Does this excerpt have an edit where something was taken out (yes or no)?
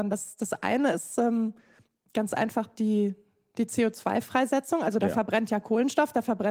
no